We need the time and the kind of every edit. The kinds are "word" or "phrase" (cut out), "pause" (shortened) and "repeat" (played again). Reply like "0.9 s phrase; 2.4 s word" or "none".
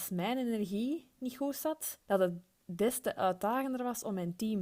2.0 s pause

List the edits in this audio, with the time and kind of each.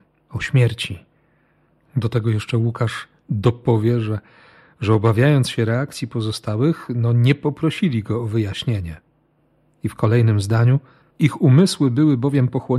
none

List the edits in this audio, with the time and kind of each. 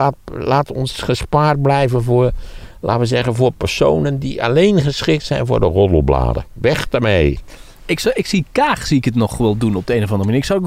none

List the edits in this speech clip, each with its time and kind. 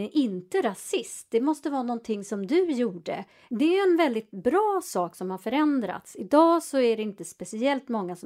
none

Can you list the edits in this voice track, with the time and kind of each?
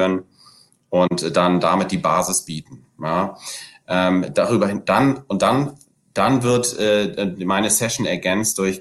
none

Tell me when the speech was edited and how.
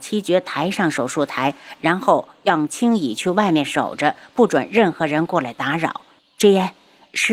6.2 s pause

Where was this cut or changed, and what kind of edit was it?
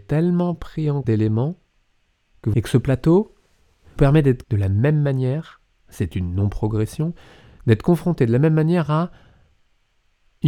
1.0 s word; 2.5 s phrase; 4.0 s word; 4.4 s word; 5.7 s pause

